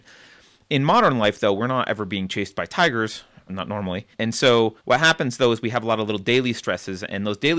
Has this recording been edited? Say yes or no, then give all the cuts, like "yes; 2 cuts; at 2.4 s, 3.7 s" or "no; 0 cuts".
yes; 3 cuts; at 3.5 s, 4.1 s, 4.8 s